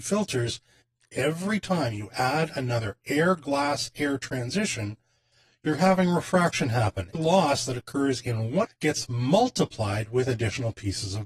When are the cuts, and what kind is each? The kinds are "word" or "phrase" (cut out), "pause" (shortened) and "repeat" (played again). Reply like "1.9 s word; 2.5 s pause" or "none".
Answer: 7.1 s phrase; 8.6 s phrase